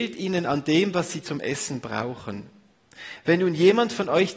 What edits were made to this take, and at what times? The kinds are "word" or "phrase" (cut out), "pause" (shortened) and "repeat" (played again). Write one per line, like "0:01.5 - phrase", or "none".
0:01.2 - word